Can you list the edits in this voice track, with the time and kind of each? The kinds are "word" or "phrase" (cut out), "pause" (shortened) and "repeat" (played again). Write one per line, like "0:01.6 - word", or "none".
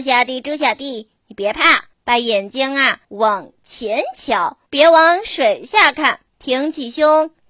0:01.9 - pause
0:03.0 - pause
0:04.7 - pause
0:06.3 - pause